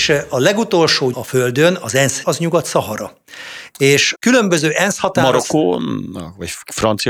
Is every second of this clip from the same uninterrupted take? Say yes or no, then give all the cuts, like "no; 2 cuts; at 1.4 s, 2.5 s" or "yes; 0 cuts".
no; 3 cuts; at 1.1 s, 2.2 s, 4.1 s